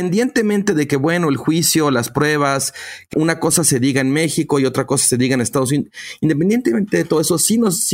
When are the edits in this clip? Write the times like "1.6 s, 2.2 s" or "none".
3.1 s